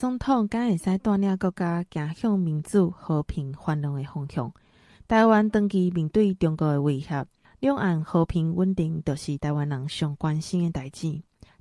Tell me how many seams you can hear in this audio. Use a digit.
0